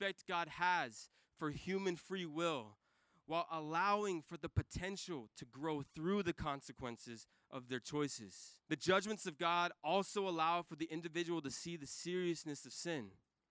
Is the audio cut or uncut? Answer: cut